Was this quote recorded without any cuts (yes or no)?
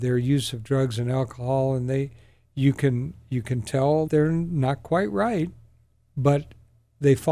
no